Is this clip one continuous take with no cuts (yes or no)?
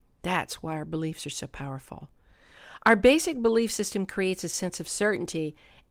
yes